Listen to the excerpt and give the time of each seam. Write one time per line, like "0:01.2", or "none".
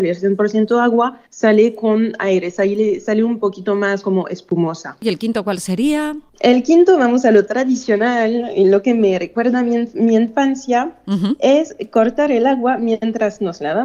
0:01.3
0:06.3